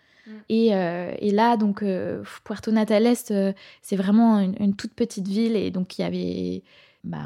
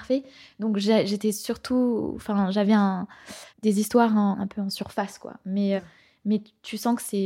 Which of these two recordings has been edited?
second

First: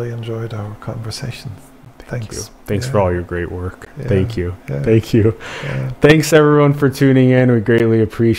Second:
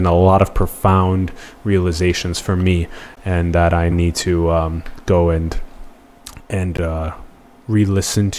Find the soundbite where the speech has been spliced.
second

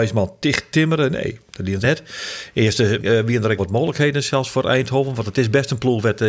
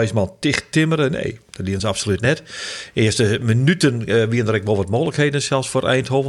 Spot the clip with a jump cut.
first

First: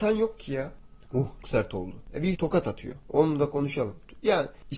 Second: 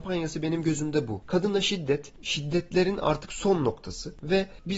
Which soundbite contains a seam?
first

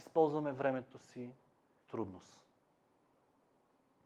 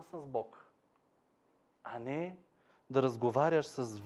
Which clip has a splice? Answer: first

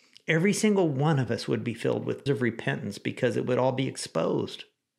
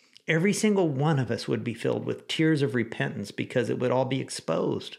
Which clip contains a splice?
first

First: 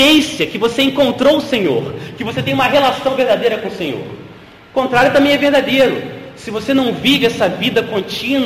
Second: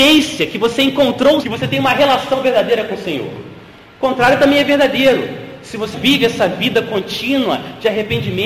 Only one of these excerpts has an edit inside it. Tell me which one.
second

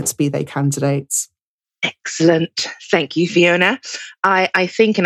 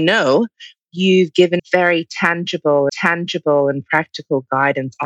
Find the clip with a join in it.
second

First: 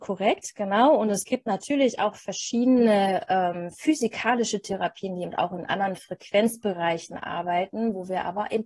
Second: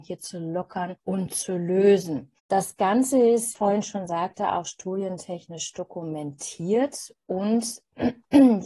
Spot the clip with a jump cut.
second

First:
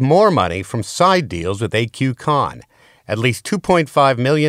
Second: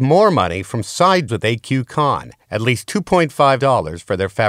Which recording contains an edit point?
second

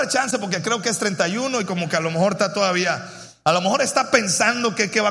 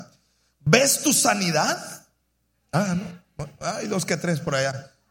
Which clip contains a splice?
second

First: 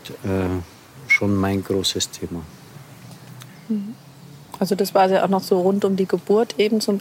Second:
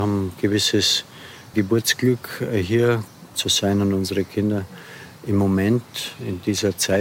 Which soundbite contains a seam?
second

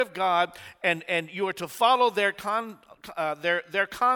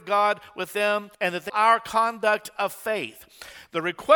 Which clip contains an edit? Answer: second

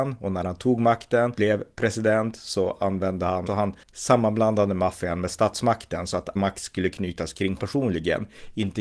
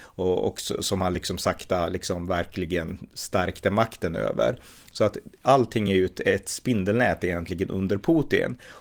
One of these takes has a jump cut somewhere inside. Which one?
first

